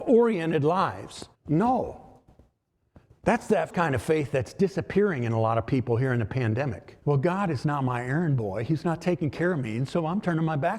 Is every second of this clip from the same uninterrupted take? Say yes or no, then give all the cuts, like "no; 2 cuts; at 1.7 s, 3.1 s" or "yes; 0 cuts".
no; 3 cuts; at 1.3 s, 3.7 s, 7.0 s